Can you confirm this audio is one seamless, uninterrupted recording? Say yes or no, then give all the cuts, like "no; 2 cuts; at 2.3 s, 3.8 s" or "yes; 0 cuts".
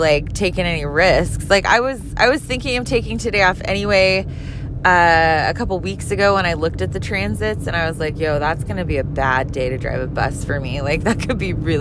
yes; 0 cuts